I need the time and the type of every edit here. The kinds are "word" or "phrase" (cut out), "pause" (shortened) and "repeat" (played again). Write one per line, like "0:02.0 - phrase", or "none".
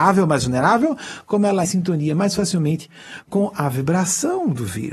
0:01.6 - phrase